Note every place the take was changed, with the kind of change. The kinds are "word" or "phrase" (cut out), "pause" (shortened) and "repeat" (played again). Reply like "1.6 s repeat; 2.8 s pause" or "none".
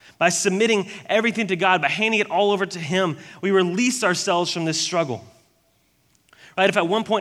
none